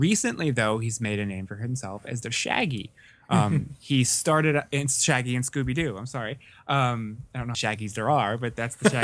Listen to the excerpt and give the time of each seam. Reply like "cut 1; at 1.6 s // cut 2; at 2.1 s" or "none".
cut 1; at 2.2 s // cut 2; at 7.5 s